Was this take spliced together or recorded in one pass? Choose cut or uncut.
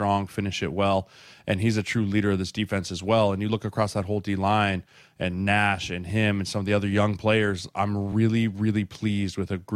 uncut